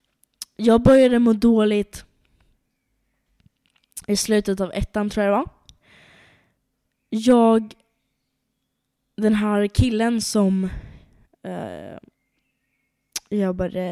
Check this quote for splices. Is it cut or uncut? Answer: uncut